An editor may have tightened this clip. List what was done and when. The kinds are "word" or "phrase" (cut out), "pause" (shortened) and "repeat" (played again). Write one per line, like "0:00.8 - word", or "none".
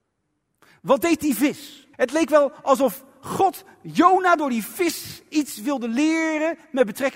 0:01.9 - pause